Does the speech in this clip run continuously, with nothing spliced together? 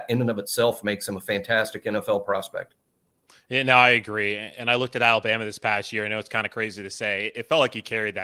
yes; 0 cuts

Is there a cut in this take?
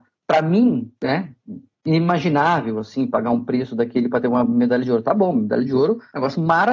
no; 0 cuts

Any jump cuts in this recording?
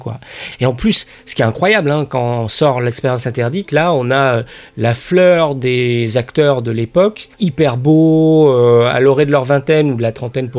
yes; 1 cut; at 7.3 s

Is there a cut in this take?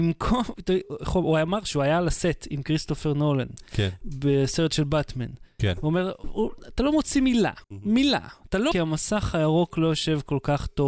yes; 3 cuts; at 6.2 s, 7.6 s, 8.7 s

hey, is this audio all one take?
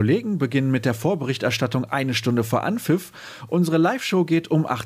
yes; 0 cuts

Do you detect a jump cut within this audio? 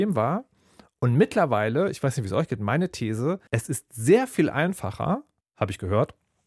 yes; 2 cuts; at 3.5 s, 5.4 s

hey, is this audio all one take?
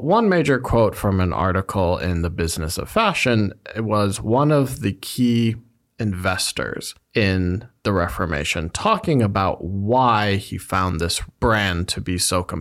yes; 0 cuts

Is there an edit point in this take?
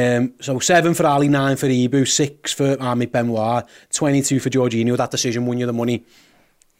no; 0 cuts

